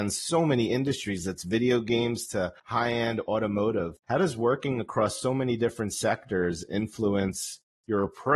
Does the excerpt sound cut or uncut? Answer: cut